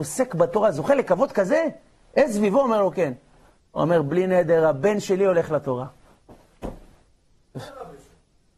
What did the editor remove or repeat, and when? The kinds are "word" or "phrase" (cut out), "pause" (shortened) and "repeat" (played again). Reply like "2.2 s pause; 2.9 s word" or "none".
none